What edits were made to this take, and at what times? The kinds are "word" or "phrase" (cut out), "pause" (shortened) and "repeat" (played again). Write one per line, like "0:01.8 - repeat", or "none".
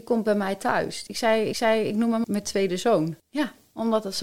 0:01.1 - phrase
0:01.5 - repeat
0:02.2 - word
0:03.2 - pause